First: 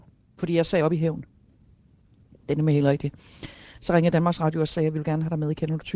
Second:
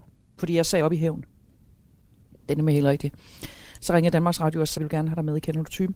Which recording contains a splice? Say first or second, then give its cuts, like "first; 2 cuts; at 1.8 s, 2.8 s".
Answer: second; 1 cut; at 4.8 s